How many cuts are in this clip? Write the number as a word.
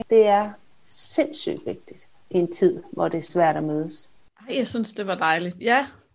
zero